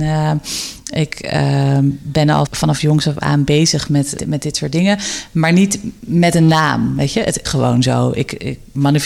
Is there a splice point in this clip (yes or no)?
yes